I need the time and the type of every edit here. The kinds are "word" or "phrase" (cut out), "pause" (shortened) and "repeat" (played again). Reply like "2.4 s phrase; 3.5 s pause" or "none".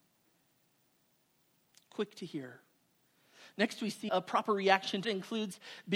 4.1 s word; 5.0 s phrase